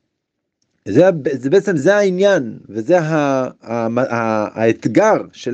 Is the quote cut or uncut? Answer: uncut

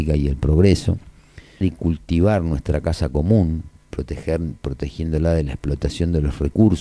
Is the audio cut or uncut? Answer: cut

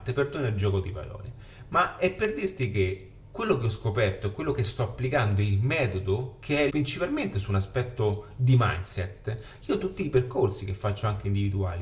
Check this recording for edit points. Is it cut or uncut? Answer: cut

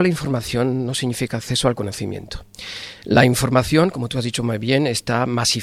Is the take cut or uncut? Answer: uncut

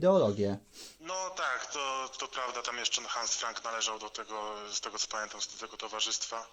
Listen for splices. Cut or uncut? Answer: uncut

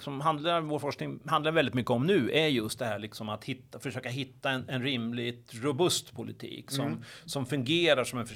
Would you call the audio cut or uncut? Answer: uncut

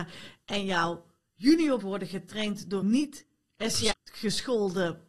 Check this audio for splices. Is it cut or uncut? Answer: cut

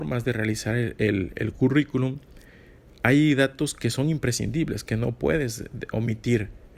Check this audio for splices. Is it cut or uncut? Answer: uncut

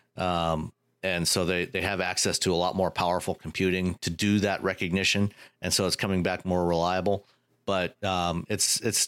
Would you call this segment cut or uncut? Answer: uncut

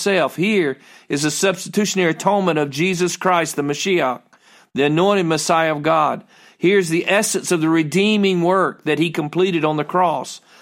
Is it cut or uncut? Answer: uncut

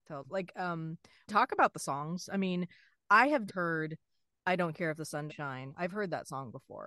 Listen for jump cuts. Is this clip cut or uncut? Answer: cut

